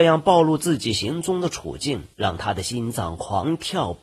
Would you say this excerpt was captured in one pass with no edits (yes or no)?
no